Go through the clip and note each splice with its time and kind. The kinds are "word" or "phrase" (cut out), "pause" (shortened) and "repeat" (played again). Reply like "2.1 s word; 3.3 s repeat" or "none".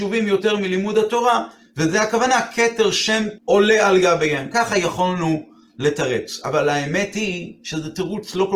3.4 s word